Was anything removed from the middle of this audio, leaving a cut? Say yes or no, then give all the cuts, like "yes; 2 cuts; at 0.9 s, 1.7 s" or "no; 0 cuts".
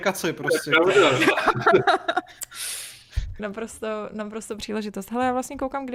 yes; 2 cuts; at 3.4 s, 4.6 s